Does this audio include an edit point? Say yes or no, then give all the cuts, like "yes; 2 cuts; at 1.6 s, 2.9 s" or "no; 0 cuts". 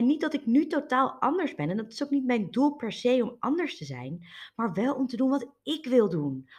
no; 0 cuts